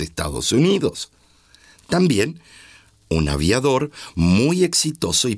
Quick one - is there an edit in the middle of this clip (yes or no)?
no